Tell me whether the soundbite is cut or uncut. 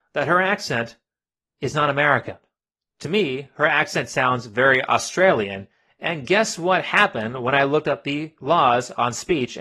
uncut